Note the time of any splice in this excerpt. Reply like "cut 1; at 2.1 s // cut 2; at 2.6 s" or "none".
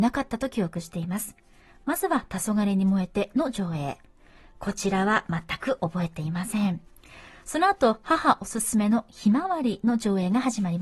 none